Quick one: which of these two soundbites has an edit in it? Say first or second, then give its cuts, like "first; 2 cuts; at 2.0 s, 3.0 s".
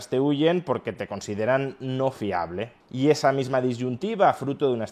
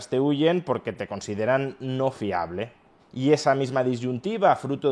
first; 1 cut; at 2.8 s